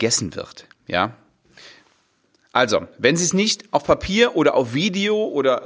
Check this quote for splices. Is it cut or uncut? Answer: uncut